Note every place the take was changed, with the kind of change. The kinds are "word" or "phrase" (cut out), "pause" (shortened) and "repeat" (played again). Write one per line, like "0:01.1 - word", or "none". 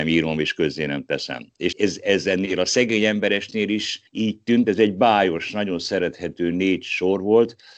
0:01.7 - word
0:04.1 - pause